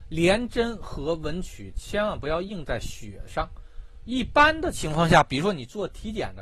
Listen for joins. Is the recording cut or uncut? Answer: cut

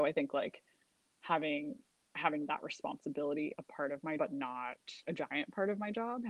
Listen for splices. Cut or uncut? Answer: cut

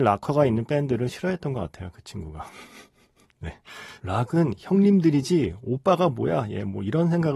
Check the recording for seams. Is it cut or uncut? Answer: uncut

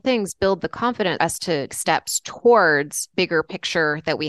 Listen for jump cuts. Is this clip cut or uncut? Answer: cut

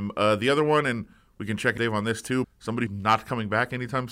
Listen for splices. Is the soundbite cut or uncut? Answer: cut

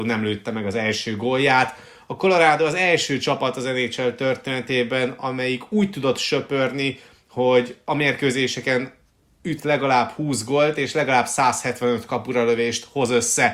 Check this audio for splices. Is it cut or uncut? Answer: uncut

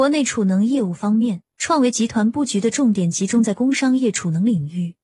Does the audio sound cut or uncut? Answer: cut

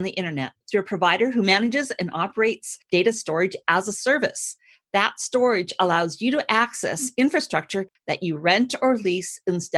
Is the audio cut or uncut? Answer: uncut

